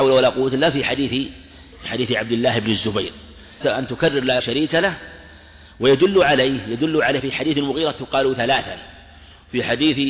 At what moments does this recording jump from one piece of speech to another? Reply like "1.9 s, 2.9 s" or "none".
3.6 s, 4.4 s, 7.2 s